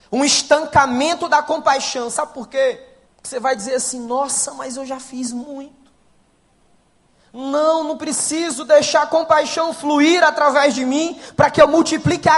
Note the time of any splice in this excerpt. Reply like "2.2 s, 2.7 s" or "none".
3.1 s